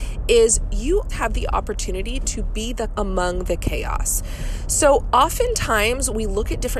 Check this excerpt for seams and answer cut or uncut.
cut